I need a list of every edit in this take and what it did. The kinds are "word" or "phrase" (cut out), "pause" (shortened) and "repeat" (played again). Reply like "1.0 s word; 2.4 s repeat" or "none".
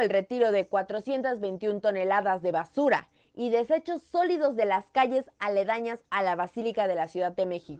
none